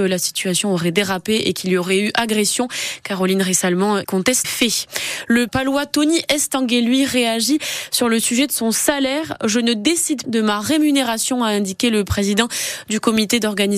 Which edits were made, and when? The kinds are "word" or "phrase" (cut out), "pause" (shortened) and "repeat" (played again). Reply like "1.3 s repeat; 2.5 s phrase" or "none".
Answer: 4.0 s word; 4.4 s word; 5.5 s word; 10.2 s word

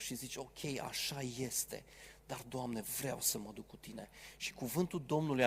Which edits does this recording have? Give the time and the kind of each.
none

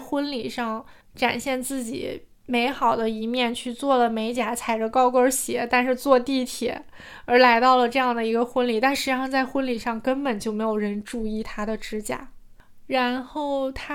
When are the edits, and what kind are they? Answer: 1.0 s pause

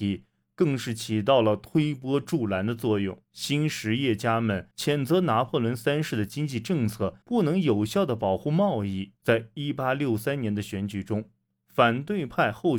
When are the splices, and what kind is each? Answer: 3.2 s pause; 4.7 s pause; 7.2 s pause; 9.2 s pause

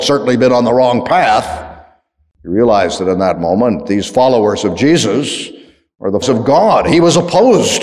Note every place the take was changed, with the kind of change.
6.2 s word

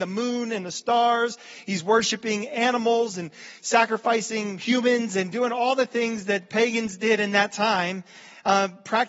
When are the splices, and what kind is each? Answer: none

